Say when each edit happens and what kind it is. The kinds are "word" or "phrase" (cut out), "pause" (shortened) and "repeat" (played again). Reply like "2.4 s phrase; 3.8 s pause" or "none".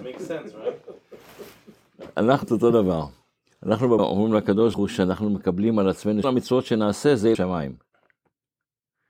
2.4 s word; 4.0 s word; 4.7 s word; 6.2 s word; 7.3 s word